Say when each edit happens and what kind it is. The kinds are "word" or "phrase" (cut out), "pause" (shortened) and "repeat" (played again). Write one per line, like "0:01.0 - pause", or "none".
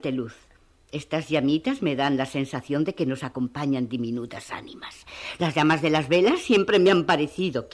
none